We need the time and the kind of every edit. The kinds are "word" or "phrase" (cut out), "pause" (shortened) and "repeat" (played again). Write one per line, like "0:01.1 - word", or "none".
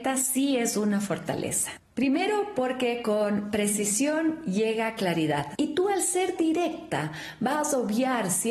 none